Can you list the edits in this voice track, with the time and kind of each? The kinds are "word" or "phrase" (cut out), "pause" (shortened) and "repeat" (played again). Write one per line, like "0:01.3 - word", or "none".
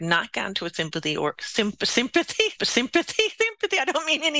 0:02.6 - repeat